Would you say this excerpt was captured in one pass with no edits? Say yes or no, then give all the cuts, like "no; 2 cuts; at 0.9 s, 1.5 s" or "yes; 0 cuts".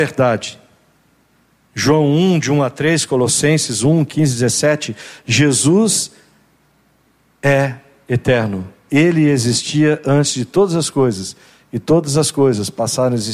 yes; 0 cuts